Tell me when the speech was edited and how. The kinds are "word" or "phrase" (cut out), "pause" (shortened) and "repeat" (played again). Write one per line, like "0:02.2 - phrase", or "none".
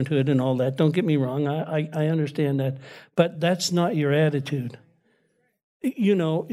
none